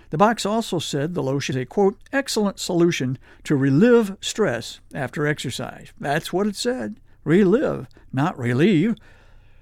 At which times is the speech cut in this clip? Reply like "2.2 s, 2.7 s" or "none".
1.5 s